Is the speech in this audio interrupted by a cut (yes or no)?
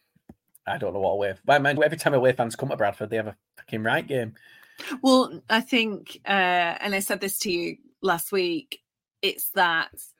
yes